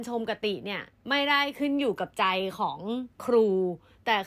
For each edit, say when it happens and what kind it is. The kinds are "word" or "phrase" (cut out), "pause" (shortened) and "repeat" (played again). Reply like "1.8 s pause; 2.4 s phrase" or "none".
3.1 s pause